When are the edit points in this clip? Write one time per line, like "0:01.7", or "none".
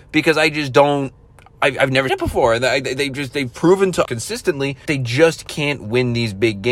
0:02.1
0:04.0
0:04.9